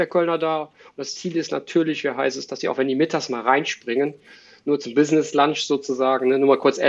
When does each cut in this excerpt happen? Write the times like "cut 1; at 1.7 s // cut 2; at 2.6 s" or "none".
none